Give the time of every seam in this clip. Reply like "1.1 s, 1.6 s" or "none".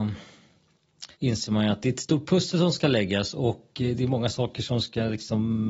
1.1 s